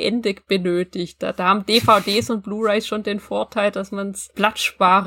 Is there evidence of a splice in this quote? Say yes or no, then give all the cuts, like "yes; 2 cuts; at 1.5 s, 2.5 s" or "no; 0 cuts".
no; 0 cuts